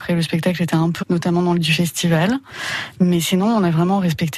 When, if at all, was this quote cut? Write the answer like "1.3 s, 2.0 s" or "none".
1.0 s, 1.6 s